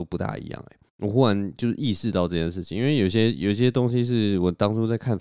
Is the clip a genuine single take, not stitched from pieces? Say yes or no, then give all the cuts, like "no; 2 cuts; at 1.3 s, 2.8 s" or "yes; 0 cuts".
no; 1 cut; at 0.9 s